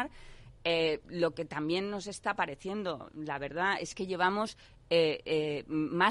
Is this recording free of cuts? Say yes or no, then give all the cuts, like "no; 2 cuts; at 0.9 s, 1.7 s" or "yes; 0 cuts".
yes; 0 cuts